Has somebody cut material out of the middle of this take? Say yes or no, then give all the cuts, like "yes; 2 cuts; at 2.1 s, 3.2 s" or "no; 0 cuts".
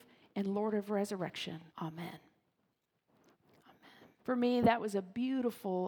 yes; 2 cuts; at 1.7 s, 4.2 s